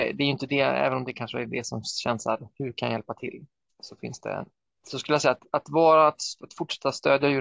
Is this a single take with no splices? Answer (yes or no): yes